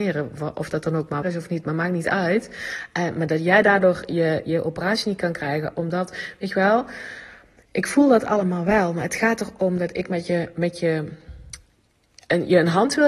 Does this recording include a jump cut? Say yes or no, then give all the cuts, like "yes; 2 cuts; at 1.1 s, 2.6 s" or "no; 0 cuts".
yes; 1 cut; at 1.2 s